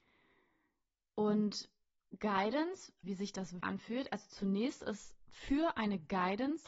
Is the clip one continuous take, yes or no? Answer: no